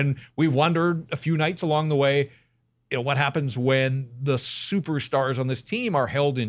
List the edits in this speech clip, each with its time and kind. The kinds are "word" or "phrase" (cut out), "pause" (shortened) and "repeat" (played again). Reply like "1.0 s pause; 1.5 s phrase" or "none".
none